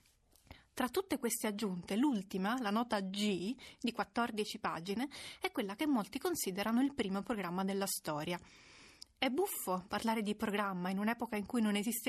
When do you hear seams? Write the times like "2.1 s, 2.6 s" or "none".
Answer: none